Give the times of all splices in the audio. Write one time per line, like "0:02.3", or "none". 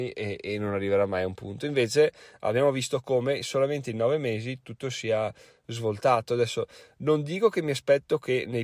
none